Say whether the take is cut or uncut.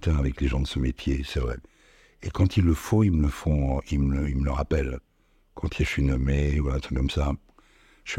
uncut